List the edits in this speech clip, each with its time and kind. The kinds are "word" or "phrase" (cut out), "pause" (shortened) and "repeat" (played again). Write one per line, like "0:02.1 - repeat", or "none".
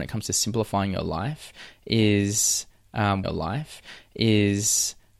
0:03.2 - repeat